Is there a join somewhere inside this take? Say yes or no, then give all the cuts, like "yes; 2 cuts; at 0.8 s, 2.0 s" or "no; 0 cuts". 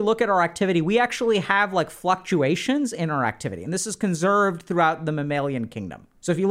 no; 0 cuts